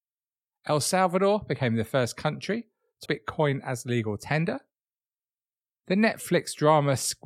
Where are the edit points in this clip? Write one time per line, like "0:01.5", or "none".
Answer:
0:03.1